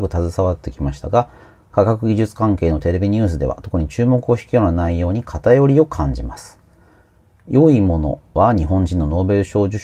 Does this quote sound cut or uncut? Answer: uncut